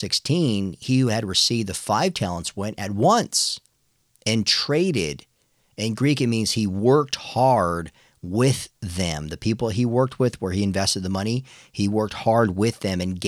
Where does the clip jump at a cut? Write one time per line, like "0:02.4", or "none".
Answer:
none